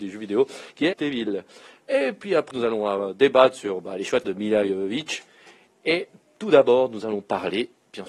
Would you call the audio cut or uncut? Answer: cut